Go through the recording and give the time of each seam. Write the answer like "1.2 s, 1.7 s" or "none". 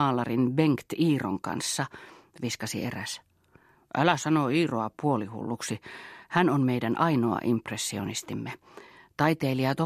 none